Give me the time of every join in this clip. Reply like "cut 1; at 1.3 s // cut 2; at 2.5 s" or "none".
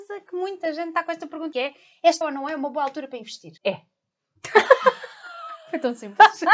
cut 1; at 1.5 s // cut 2; at 2.2 s // cut 3; at 3.6 s